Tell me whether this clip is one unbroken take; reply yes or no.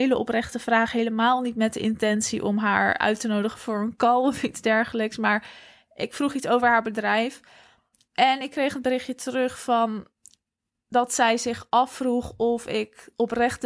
yes